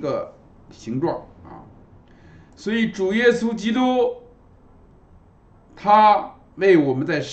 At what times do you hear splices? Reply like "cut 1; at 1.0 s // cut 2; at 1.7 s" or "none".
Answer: none